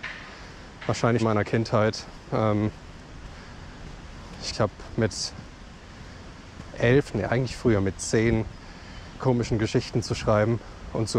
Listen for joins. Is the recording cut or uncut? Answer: cut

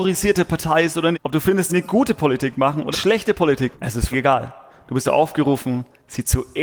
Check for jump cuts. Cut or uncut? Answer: cut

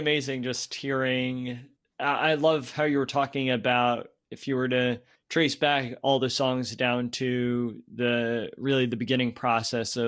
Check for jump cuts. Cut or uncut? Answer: cut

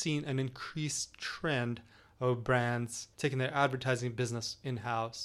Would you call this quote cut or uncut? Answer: cut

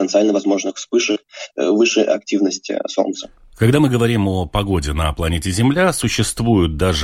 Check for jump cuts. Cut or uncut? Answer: uncut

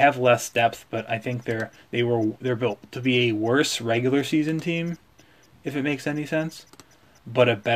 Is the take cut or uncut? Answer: uncut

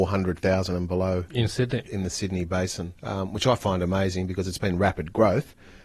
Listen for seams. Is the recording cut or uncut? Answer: cut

